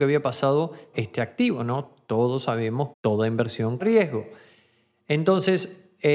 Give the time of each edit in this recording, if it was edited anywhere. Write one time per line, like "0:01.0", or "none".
0:00.9
0:02.9
0:03.8

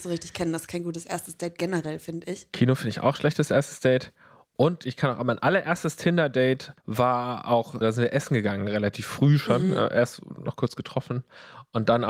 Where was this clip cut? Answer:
0:06.8
0:07.8

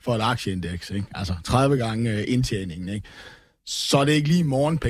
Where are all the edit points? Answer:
none

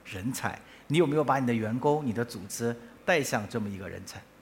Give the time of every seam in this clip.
none

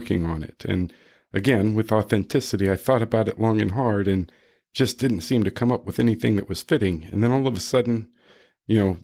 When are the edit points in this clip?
none

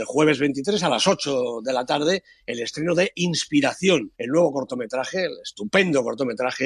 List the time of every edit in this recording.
0:04.1

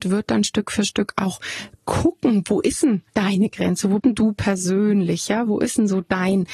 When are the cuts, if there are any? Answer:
0:03.1
0:04.0

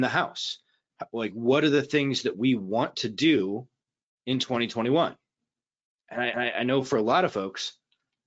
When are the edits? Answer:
0:06.3

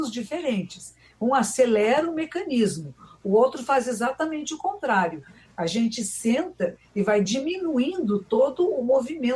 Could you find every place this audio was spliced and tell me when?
none

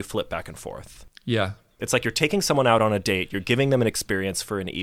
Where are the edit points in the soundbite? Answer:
none

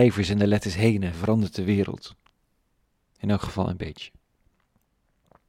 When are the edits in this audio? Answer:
none

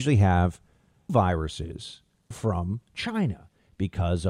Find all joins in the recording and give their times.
0:01.1
0:02.3

